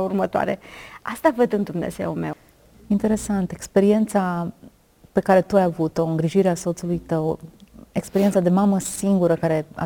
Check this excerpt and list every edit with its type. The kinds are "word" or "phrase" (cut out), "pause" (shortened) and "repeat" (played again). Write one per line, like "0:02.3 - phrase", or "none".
none

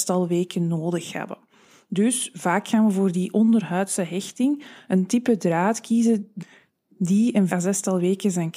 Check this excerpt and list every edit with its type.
0:07.5 - word

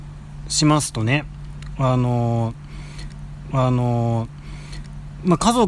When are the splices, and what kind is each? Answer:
0:03.5 - repeat

